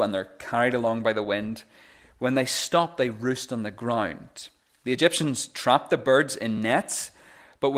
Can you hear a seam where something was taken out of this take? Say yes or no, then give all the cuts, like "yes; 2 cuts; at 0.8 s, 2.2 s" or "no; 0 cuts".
no; 0 cuts